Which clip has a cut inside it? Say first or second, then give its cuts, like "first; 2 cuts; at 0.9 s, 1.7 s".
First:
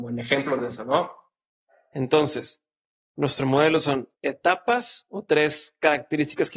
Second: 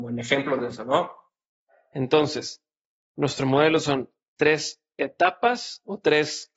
first; 1 cut; at 4.1 s